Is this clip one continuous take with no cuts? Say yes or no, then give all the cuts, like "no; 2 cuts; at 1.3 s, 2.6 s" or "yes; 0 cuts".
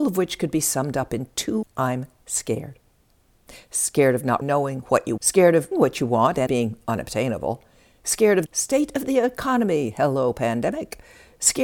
no; 6 cuts; at 1.6 s, 4.4 s, 5.2 s, 5.7 s, 6.5 s, 8.5 s